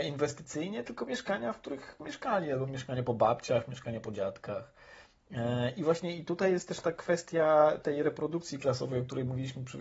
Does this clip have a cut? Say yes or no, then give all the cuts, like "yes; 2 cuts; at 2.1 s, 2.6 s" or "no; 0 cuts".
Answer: no; 0 cuts